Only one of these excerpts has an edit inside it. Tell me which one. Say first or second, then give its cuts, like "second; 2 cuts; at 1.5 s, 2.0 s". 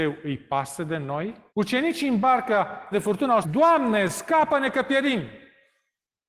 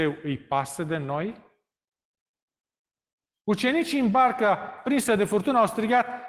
first; 3 cuts; at 1.5 s, 2.9 s, 3.4 s